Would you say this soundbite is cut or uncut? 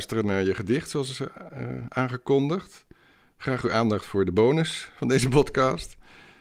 uncut